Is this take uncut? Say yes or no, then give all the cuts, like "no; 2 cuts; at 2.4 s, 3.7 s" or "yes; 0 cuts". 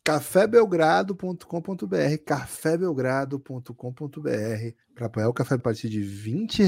no; 2 cuts; at 4.8 s, 5.6 s